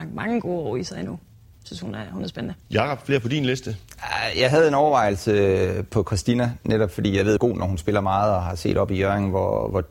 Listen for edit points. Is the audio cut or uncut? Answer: cut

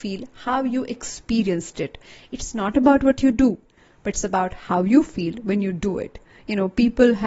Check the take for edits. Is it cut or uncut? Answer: uncut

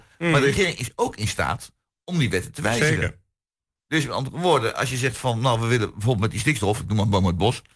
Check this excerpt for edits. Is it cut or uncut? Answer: uncut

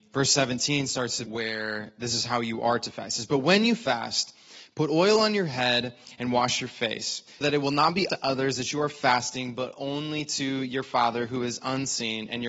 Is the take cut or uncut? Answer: cut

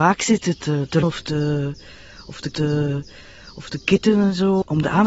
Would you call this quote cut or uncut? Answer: cut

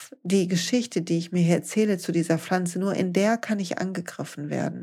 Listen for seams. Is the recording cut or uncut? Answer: uncut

